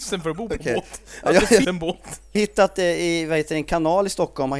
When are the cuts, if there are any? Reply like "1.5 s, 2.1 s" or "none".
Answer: 1.6 s, 2.4 s